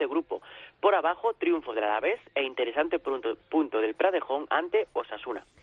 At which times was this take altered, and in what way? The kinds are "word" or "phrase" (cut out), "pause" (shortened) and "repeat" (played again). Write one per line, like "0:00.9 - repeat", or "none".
none